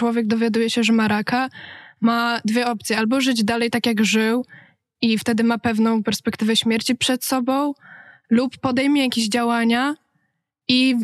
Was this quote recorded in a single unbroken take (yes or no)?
yes